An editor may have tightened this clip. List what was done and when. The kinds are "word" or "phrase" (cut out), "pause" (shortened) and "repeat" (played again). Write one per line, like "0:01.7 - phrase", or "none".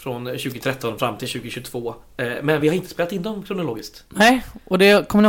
none